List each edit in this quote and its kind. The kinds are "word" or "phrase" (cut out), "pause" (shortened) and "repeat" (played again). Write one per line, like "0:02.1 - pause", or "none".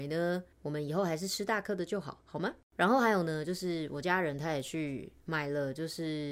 0:02.6 - pause

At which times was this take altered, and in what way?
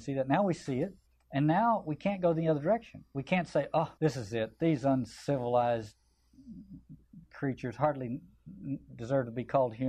0:01.1 - pause
0:04.0 - pause
0:07.2 - pause

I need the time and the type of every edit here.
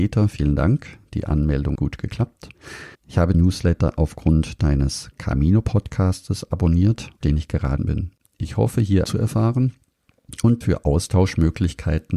0:01.7 - word
0:02.9 - pause
0:03.3 - word
0:05.1 - pause
0:07.2 - word
0:07.8 - word
0:09.0 - phrase
0:10.6 - word

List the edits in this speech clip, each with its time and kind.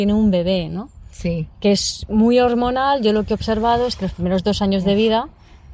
none

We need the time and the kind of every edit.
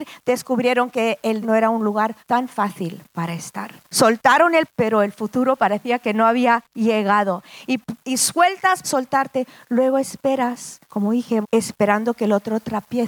0:01.4 - word
0:02.2 - pause
0:03.8 - pause
0:04.7 - word
0:08.0 - pause
0:08.8 - phrase
0:10.8 - pause
0:11.4 - phrase

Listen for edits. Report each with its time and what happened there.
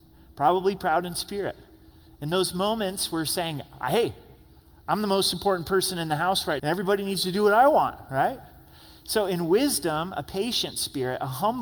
0:06.6 - word

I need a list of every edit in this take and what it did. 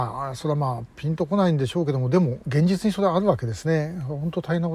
0:02.4 - pause

